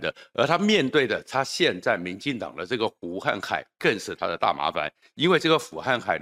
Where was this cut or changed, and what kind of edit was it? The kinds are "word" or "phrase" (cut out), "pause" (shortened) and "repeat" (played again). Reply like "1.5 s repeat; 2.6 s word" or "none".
none